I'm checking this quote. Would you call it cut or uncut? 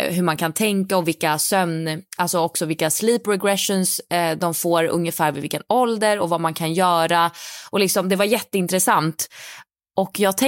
uncut